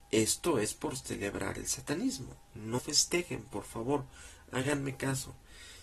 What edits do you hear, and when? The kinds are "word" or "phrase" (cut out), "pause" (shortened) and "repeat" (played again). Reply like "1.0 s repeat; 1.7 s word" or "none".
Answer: 2.8 s word